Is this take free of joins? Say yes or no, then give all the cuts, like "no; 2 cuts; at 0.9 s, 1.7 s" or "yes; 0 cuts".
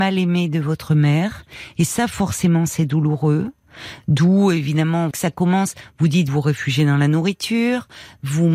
no; 2 cuts; at 5.1 s, 6.3 s